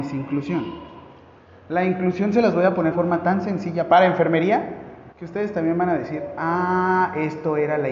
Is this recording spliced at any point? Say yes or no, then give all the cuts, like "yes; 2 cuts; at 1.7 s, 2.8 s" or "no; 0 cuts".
yes; 2 cuts; at 2.9 s, 5.1 s